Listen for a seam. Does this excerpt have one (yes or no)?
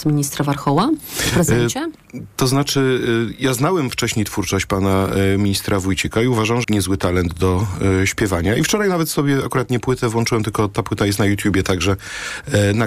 yes